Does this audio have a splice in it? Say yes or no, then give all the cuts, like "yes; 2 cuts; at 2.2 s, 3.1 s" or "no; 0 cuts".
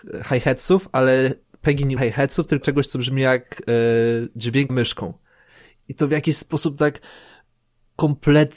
yes; 3 cuts; at 2.0 s, 2.6 s, 4.7 s